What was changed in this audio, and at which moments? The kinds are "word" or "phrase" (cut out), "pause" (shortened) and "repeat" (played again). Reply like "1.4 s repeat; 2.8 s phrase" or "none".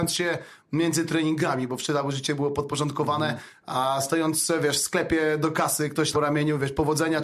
6.1 s phrase

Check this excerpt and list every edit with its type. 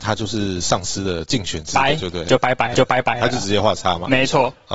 2.7 s repeat

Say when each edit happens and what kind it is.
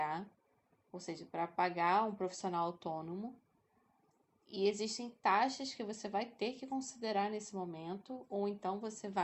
none

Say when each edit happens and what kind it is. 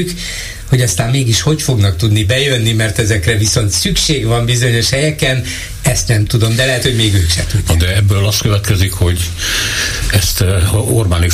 none

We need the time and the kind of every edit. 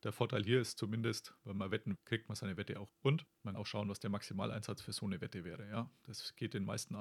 2.0 s word; 2.9 s word; 3.5 s word

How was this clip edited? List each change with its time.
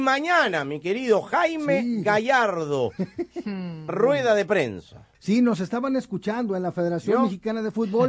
3.9 s phrase; 5.1 s pause

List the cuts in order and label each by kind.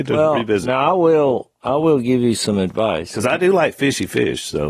none

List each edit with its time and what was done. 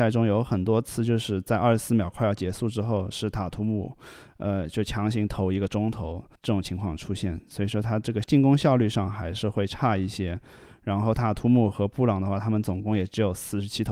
6.3 s pause

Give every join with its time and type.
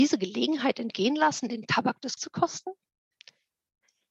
2.2 s word

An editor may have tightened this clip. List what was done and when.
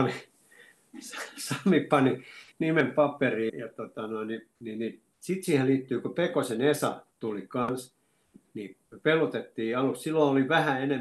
3.5 s word; 4.6 s pause; 5.1 s pause; 7.1 s pause; 8.8 s pause

